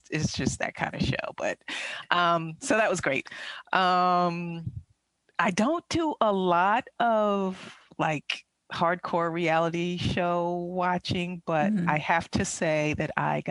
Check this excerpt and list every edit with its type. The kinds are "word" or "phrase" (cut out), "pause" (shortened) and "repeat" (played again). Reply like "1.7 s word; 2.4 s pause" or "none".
none